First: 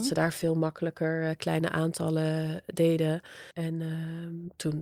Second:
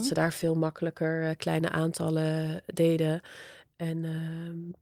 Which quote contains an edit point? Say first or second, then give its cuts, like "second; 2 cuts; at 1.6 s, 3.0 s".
first; 1 cut; at 3.5 s